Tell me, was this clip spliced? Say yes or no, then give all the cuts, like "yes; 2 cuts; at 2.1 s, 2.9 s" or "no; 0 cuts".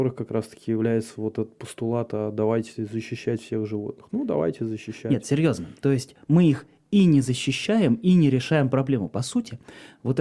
no; 0 cuts